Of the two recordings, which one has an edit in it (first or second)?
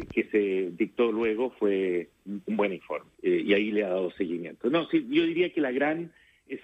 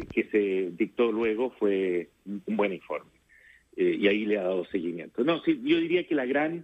first